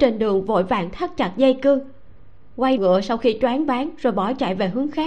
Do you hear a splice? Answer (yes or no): yes